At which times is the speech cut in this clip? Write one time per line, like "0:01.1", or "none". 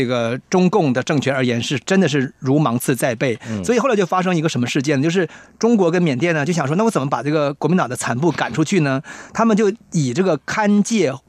none